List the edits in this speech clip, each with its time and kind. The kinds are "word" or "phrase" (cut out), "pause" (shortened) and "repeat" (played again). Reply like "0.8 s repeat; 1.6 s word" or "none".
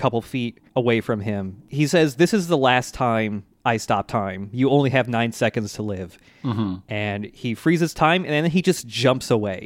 none